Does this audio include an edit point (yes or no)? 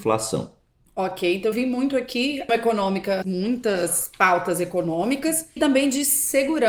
yes